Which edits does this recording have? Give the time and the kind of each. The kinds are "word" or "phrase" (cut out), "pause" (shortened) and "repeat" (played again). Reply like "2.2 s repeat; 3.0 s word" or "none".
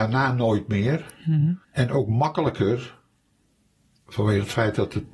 1.6 s pause